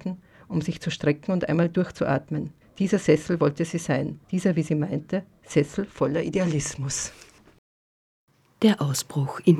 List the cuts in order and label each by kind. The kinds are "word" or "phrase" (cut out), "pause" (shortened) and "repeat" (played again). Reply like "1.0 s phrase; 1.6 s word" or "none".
2.6 s pause; 4.2 s pause